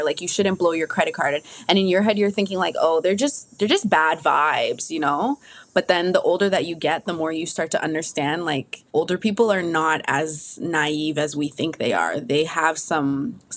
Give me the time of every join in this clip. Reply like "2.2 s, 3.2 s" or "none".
8.9 s